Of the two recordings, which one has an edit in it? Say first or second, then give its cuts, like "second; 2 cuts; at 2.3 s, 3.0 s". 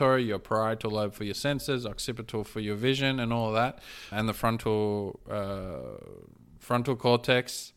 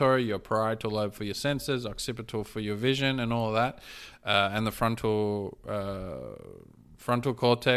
first; 1 cut; at 4.1 s